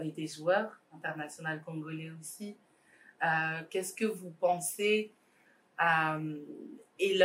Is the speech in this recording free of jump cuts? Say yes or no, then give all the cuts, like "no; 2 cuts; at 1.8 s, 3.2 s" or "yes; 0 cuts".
yes; 0 cuts